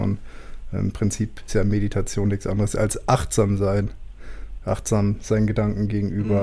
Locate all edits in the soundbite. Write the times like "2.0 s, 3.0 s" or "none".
1.5 s